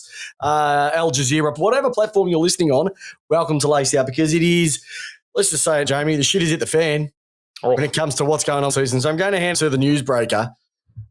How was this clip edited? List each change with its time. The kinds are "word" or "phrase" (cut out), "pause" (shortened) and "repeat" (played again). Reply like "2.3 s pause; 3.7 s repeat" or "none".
1.6 s word; 1.9 s word; 5.2 s pause; 5.8 s word; 8.7 s phrase; 9.5 s phrase